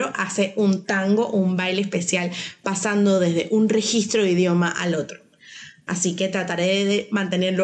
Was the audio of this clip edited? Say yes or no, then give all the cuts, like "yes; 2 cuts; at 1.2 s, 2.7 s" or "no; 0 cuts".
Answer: no; 0 cuts